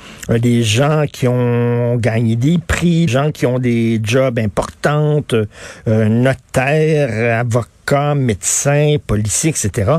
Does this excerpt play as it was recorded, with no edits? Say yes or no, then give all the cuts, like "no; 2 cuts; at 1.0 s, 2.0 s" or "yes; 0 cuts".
no; 1 cut; at 3.1 s